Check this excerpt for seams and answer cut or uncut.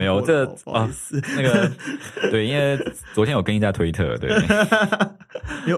uncut